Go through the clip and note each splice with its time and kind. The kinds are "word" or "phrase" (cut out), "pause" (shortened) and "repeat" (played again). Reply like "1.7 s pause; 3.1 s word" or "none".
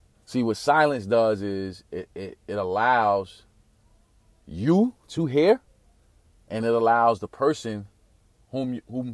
none